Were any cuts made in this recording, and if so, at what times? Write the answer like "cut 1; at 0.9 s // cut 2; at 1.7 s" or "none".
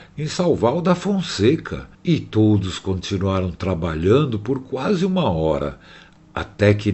cut 1; at 1.9 s